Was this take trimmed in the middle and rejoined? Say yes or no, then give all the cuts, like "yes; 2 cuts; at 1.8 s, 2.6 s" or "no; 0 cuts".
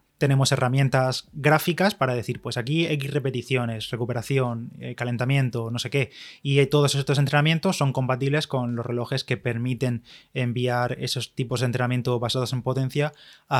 no; 0 cuts